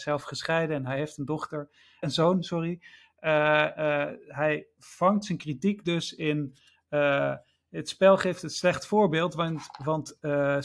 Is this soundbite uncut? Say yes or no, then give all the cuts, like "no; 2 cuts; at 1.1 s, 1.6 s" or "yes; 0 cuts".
no; 3 cuts; at 2.0 s, 3.8 s, 4.8 s